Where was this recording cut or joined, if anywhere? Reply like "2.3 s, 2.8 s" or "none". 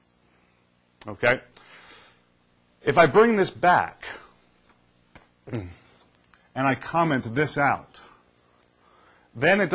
none